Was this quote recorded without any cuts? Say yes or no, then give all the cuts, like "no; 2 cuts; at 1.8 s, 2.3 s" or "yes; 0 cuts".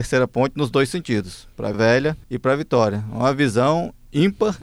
no; 2 cuts; at 1.7 s, 2.2 s